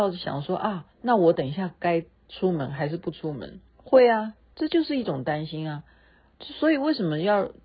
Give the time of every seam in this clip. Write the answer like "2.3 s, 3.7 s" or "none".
0.9 s, 3.7 s, 6.3 s